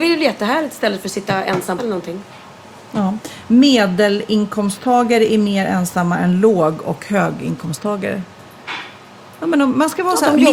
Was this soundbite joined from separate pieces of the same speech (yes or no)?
yes